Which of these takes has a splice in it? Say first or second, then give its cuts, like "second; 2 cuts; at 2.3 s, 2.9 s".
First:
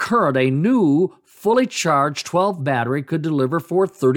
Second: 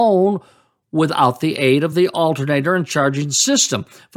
first; 1 cut; at 2.6 s